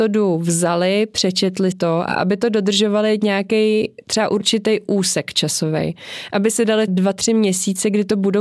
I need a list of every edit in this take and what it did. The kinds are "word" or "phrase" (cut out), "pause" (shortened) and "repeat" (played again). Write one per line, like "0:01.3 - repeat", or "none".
0:01.7 - word
0:06.9 - word

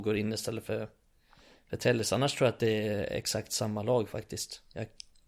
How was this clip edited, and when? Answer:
none

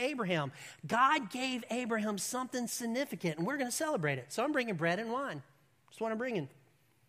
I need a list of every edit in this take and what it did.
none

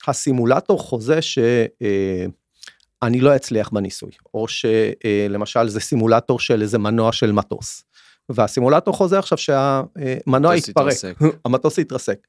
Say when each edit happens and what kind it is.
none

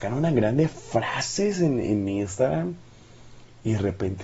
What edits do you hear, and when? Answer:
none

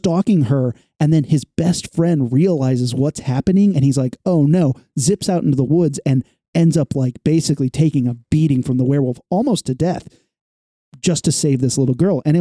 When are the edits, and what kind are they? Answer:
none

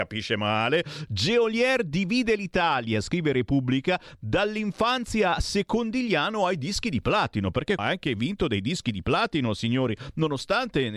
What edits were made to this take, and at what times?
0:07.8 - word

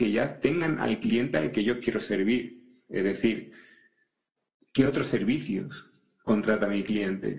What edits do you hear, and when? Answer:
none

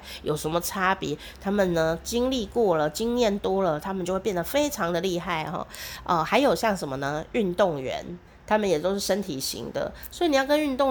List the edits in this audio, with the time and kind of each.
0:08.3 - pause

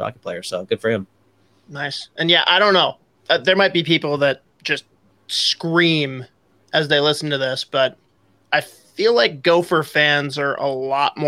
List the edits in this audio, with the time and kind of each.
none

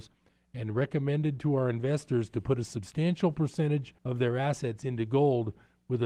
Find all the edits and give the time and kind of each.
0:04.0 - pause

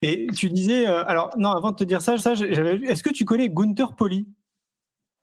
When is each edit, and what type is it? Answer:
0:02.2 - repeat

